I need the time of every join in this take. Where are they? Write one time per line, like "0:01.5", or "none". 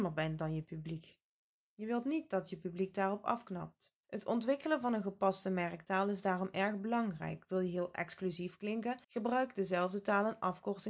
0:04.0
0:09.0